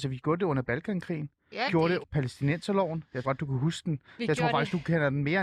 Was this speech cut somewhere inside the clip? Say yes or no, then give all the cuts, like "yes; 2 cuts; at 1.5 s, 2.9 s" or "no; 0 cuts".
yes; 3 cuts; at 1.7 s, 2.0 s, 3.2 s